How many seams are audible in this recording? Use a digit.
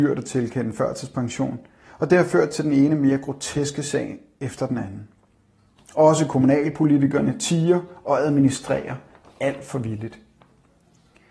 0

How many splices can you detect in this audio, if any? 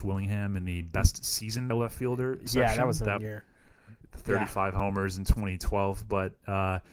2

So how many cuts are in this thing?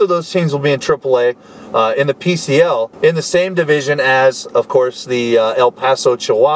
1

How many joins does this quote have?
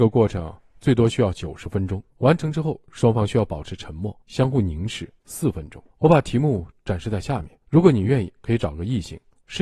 5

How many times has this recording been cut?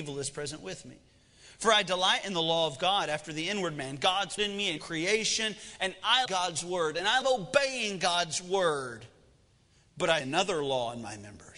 5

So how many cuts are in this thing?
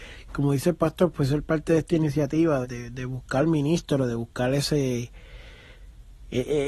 1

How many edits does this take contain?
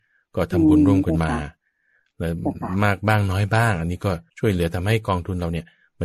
1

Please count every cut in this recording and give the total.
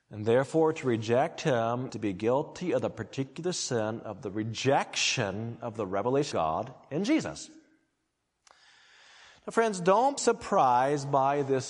3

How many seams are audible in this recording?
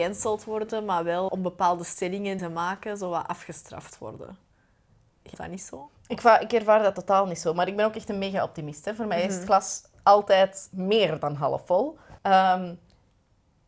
4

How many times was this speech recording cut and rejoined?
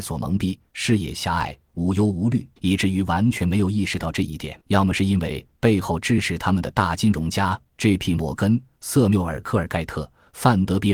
2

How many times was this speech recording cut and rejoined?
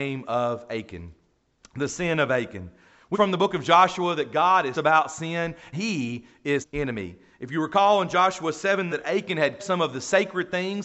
6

